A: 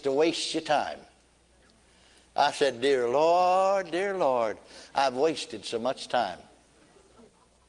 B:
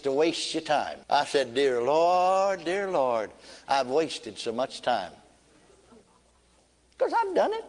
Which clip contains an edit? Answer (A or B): B